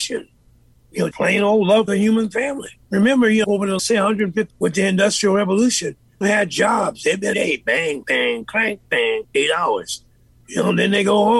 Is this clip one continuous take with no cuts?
no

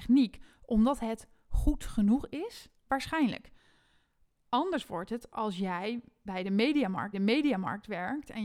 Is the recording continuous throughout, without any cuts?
no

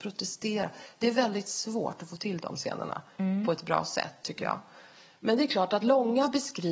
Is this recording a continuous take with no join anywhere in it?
yes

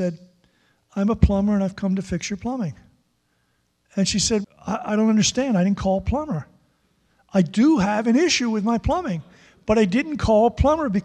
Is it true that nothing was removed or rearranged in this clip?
no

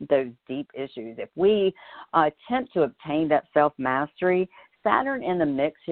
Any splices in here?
no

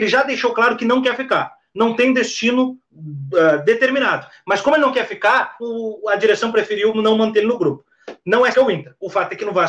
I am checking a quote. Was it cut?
yes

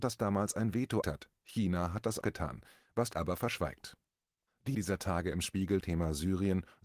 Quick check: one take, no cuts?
no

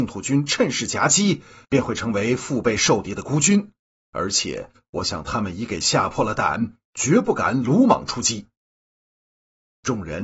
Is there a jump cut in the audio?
no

